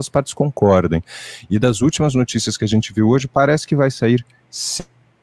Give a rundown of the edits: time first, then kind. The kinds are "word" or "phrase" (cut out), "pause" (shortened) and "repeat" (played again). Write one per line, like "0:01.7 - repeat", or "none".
none